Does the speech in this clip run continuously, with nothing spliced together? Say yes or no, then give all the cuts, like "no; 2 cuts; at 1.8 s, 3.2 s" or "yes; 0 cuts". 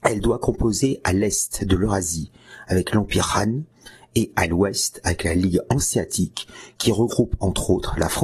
yes; 0 cuts